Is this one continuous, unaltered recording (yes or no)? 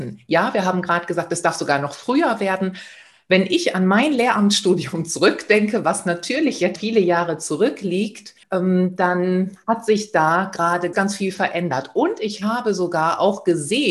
no